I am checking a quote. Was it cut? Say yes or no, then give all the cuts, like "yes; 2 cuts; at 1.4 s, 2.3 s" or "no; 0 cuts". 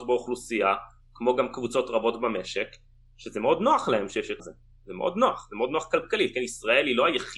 yes; 1 cut; at 4.4 s